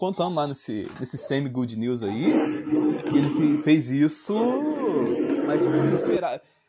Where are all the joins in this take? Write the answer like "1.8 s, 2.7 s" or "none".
none